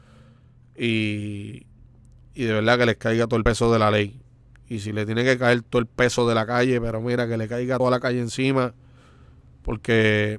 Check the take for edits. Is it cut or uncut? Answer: uncut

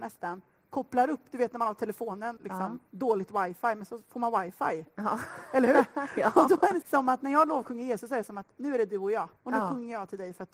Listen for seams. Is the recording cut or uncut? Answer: cut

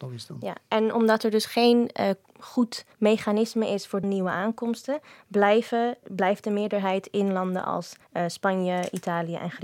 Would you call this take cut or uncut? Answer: cut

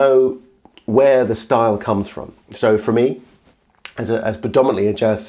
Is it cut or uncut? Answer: cut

